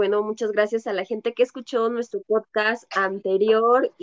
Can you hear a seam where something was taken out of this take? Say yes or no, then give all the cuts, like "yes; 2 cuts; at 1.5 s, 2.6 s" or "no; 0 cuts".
no; 0 cuts